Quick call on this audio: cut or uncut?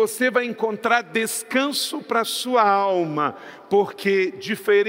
uncut